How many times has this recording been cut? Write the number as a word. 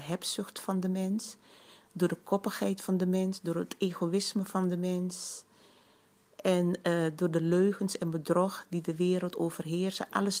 zero